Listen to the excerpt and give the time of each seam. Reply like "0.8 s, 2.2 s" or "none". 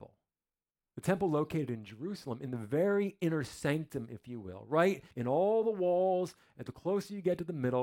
5.1 s